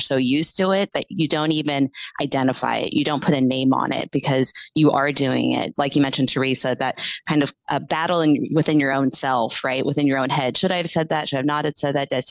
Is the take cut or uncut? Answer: uncut